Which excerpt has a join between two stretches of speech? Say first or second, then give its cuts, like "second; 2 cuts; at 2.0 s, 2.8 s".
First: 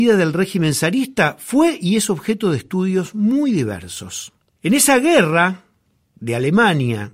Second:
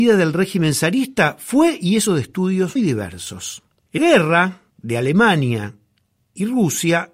second; 4 cuts; at 2.1 s, 2.8 s, 4.0 s, 4.7 s